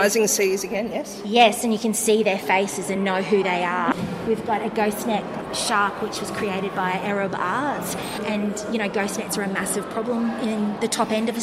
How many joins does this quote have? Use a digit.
0